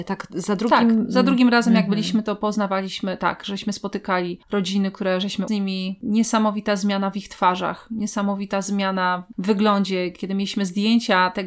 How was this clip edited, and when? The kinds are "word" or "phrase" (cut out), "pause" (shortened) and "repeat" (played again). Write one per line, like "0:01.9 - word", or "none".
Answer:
0:05.5 - phrase